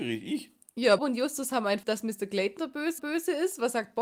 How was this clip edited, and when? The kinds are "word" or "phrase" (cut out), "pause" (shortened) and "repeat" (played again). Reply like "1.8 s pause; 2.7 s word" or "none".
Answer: 1.0 s word; 1.8 s word; 2.6 s word; 3.0 s repeat